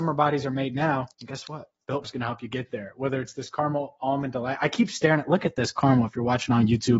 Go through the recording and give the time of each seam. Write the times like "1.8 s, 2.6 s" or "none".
1.1 s, 2.0 s